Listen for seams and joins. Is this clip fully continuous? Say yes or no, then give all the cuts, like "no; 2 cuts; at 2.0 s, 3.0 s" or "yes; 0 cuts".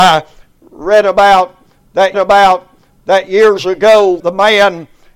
no; 2 cuts; at 2.1 s, 4.2 s